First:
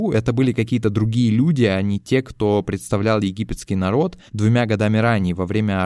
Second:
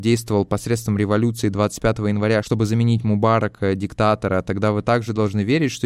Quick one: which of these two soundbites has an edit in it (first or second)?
first